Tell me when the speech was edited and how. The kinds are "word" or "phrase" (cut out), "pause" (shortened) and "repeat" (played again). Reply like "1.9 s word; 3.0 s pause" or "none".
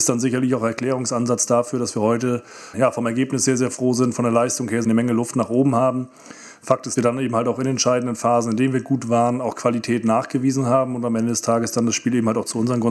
2.7 s word; 4.8 s word; 7.0 s phrase